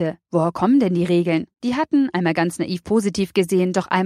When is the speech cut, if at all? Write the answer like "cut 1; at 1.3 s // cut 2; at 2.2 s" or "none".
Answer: cut 1; at 1.5 s